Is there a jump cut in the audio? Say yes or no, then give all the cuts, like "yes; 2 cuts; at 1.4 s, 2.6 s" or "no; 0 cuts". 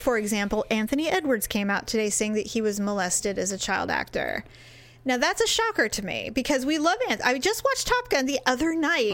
no; 0 cuts